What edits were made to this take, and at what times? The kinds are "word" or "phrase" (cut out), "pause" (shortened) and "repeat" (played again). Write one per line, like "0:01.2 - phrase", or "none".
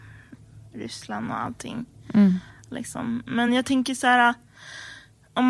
none